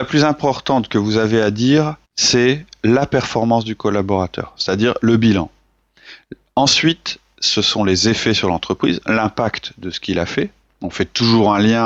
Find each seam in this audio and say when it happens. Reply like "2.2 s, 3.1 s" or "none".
2.0 s